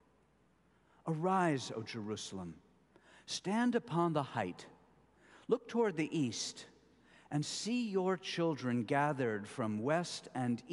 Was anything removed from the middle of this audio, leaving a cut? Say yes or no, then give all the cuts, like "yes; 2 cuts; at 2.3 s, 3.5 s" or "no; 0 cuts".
no; 0 cuts